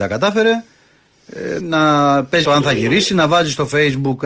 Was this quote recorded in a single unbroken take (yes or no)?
no